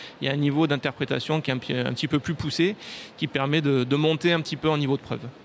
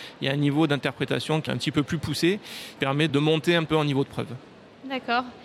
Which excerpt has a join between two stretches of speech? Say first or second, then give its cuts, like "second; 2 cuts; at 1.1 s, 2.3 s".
second; 4 cuts; at 1.5 s, 2.8 s, 3.1 s, 3.7 s